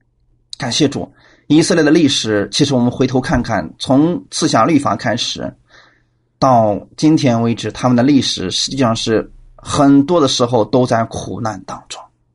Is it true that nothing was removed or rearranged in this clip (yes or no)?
yes